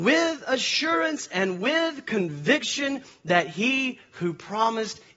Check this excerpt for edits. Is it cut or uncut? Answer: uncut